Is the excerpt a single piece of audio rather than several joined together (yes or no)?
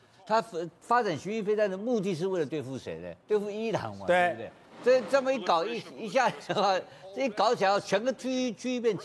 no